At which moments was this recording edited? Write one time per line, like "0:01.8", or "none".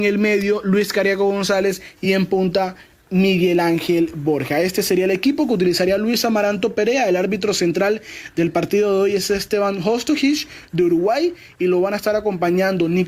none